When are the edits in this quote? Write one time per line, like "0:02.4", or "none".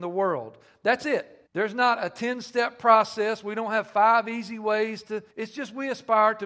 0:01.5
0:05.3